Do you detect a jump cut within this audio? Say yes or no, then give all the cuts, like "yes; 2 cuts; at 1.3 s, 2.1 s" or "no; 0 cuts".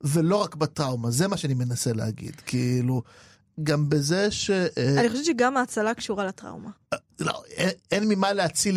no; 0 cuts